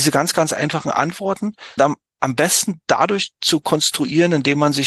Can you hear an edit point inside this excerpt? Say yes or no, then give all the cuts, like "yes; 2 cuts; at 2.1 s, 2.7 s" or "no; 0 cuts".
yes; 1 cut; at 1.8 s